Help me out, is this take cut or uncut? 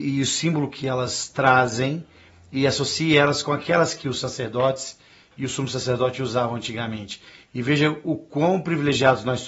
uncut